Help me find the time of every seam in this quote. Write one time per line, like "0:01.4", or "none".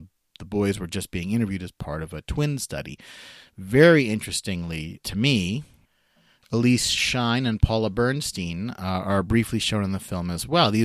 0:05.0